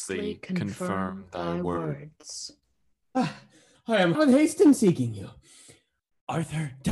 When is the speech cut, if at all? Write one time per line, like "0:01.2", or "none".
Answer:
0:03.7
0:04.1

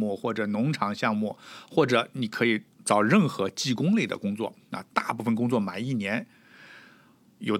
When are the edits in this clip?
0:02.7

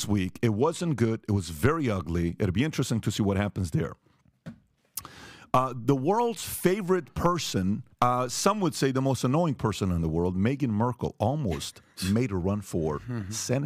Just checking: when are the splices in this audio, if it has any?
0:07.9

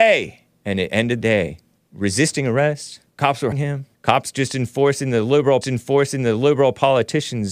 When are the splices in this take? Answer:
0:01.2
0:01.8
0:03.1
0:03.5
0:03.9
0:05.6

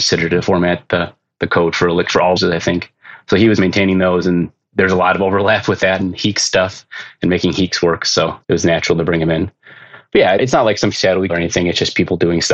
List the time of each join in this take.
0:02.4
0:03.6
0:08.4
0:10.4
0:10.9
0:11.3

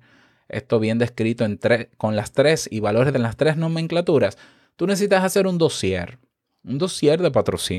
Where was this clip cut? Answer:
0:03.1

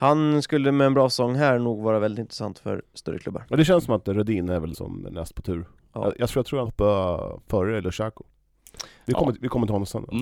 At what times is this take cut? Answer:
0:04.7
0:05.8
0:06.7

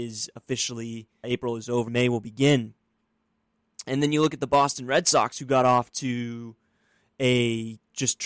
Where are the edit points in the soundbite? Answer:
0:01.2
0:01.9

